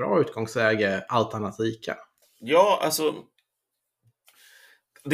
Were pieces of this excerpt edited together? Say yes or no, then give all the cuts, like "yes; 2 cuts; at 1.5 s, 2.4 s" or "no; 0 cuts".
yes; 1 cut; at 2.2 s